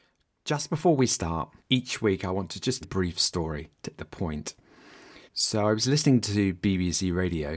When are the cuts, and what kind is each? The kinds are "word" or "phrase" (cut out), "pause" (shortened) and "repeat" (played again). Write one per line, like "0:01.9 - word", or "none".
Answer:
0:01.6 - pause
0:02.8 - phrase
0:04.0 - word
0:05.3 - pause